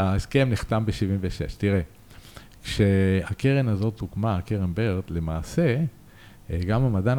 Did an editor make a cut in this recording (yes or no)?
no